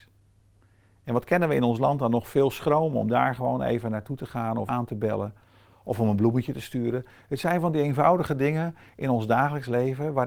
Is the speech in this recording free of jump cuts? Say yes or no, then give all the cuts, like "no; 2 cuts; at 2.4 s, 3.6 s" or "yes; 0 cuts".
no; 1 cut; at 4.7 s